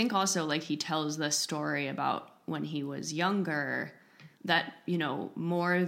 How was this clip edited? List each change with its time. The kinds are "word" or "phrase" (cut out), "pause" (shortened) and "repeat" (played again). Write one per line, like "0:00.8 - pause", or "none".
0:04.3 - pause